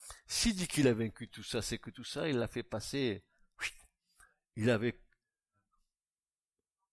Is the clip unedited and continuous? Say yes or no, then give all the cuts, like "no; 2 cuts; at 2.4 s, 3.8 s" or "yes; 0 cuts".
yes; 0 cuts